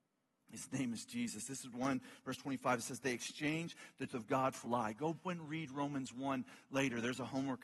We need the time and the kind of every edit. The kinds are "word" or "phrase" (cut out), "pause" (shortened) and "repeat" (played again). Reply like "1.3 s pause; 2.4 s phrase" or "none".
1.7 s word; 4.1 s word; 4.7 s word; 5.2 s word